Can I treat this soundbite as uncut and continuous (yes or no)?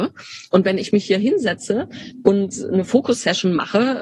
yes